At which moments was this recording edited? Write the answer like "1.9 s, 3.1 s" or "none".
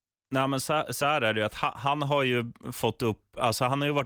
none